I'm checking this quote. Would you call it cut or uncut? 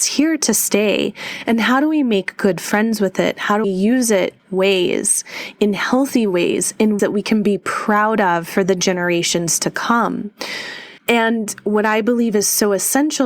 cut